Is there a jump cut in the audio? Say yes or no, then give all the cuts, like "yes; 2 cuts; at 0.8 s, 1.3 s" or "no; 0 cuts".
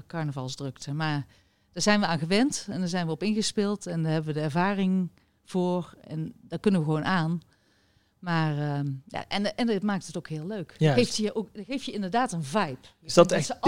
no; 0 cuts